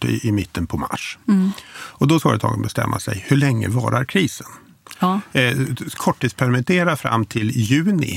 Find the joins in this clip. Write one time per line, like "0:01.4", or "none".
0:02.2
0:06.0